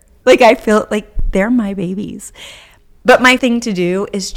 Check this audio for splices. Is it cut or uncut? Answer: cut